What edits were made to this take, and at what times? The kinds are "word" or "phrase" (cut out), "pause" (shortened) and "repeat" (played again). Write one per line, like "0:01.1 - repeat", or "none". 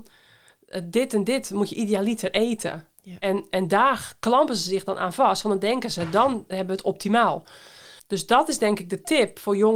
0:08.0 - pause